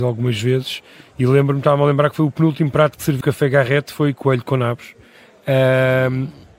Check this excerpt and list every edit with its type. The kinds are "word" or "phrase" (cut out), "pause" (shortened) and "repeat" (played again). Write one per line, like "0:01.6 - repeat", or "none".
0:03.2 - word